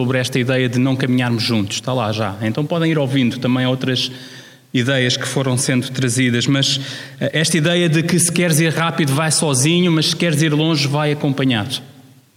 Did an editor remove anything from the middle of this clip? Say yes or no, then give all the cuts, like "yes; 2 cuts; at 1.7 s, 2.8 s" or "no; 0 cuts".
no; 0 cuts